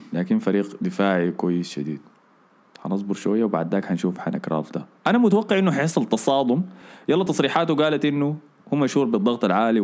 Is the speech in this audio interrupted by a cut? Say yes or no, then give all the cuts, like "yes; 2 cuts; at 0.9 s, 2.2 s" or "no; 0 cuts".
no; 0 cuts